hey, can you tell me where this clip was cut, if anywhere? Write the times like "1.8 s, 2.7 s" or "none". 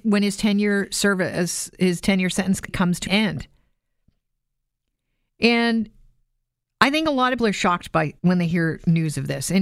1.7 s, 2.7 s, 3.1 s, 6.2 s, 7.4 s, 8.2 s